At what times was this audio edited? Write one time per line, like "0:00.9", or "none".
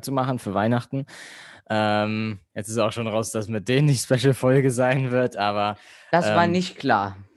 none